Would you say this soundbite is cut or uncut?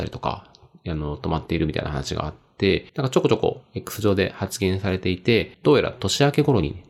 cut